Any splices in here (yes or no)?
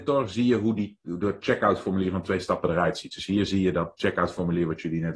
no